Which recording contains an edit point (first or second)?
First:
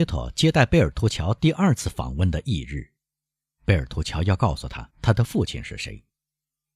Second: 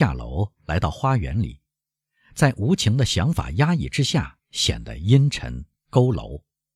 first